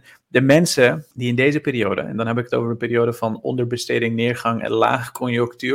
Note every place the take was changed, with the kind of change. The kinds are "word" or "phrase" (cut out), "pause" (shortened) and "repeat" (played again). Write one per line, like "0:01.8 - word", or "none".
0:01.1 - pause